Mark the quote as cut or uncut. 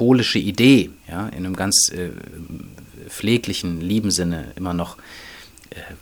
cut